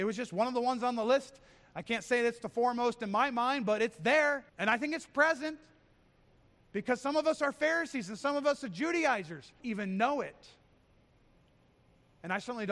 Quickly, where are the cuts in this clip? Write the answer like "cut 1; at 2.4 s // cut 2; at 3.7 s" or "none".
cut 1; at 4.5 s // cut 2; at 9.6 s